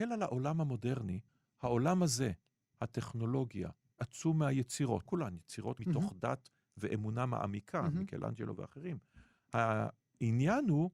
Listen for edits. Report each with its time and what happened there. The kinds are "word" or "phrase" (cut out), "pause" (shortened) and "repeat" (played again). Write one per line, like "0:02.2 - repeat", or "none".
0:01.3 - pause
0:02.7 - word
0:04.0 - word
0:05.1 - word
0:05.8 - phrase